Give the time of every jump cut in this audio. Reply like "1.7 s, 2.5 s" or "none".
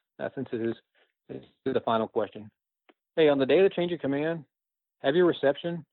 none